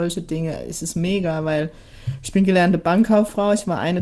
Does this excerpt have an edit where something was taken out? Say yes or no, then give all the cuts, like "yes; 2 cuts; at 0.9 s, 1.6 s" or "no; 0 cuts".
no; 0 cuts